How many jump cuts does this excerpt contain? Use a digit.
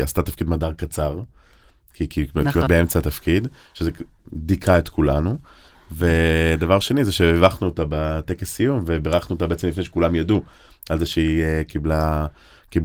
1